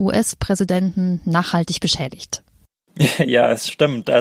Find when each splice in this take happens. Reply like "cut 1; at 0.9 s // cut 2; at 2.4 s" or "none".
none